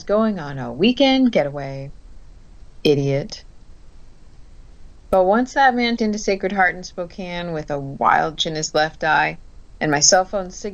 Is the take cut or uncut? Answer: cut